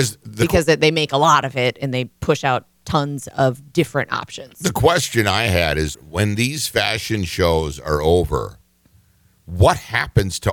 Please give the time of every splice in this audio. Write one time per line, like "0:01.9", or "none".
0:05.9